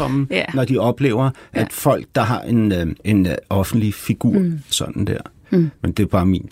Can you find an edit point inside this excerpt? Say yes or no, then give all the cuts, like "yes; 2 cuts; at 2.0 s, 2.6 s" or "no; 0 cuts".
yes; 2 cuts; at 3.0 s, 4.7 s